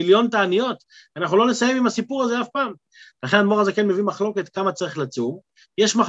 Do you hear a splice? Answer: no; 0 cuts

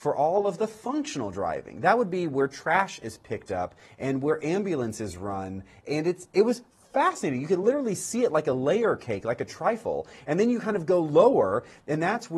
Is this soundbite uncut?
yes; 0 cuts

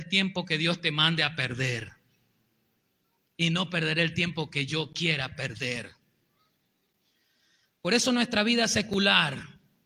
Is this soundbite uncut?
yes; 0 cuts

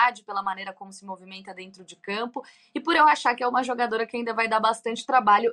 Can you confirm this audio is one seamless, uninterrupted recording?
yes; 0 cuts

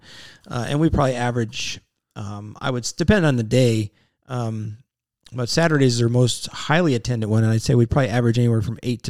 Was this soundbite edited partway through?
no; 0 cuts

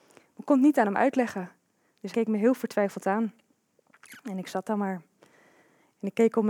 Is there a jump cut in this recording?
yes; 1 cut; at 2.1 s

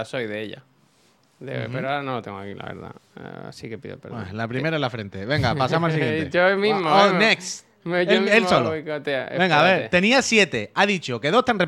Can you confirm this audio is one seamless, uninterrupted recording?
yes; 0 cuts

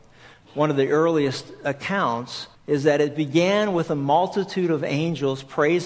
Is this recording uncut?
no; 1 cut; at 2.5 s

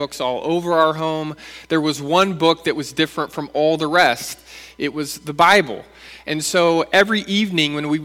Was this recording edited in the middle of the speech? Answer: no; 0 cuts

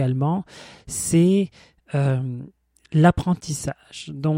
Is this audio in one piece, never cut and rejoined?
yes; 0 cuts

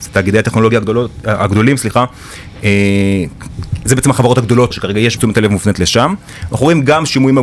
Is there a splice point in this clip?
yes; 3 cuts; at 3.9 s, 4.7 s, 5.2 s

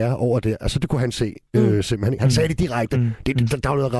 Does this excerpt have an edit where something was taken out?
no; 0 cuts

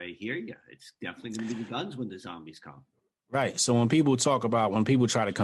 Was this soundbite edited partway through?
no; 0 cuts

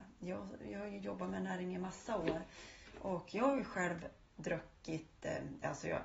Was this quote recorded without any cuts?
yes; 0 cuts

